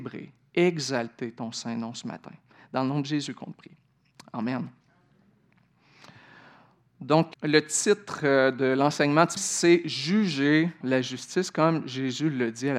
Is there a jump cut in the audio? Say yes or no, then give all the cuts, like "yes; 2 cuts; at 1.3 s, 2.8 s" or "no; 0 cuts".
yes; 3 cuts; at 7.3 s, 9.4 s, 10.8 s